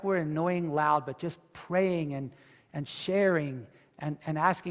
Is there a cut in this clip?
no; 0 cuts

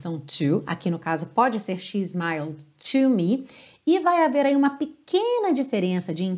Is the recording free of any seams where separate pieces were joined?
yes; 0 cuts

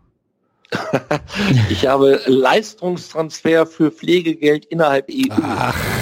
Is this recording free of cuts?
no; 1 cut; at 5.1 s

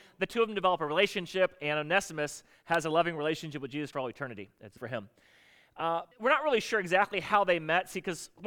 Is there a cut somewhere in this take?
yes; 3 cuts; at 3.9 s, 4.8 s, 6.1 s

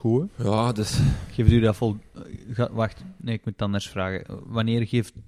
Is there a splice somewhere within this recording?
no; 0 cuts

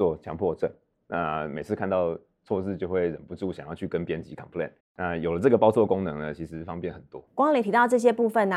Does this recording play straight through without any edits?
no; 2 cuts; at 4.8 s, 7.3 s

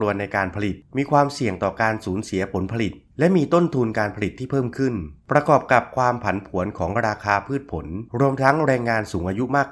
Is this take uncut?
no; 1 cut; at 8.1 s

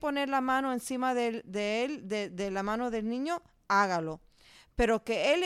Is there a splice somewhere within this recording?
no; 0 cuts

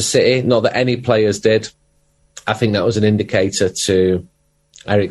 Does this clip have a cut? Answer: no; 0 cuts

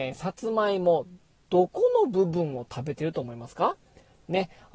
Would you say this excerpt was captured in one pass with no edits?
yes; 0 cuts

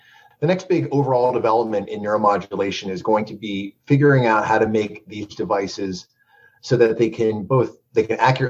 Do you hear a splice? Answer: no; 0 cuts

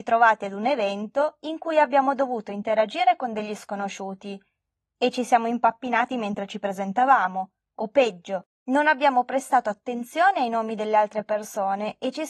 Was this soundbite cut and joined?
no; 0 cuts

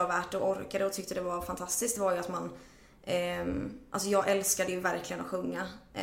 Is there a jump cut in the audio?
no; 0 cuts

